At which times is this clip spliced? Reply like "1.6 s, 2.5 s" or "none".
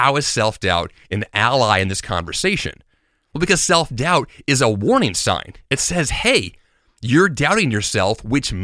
none